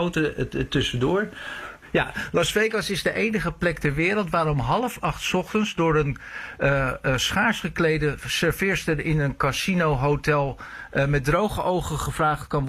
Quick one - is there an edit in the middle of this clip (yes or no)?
no